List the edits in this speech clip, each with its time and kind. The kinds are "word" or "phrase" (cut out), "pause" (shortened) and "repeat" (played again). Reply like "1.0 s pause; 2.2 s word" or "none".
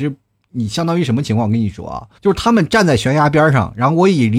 2.1 s pause